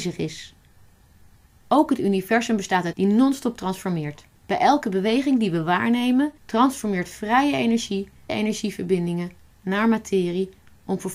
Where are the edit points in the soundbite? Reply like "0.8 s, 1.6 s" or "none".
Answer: 2.9 s, 4.3 s, 6.4 s, 8.3 s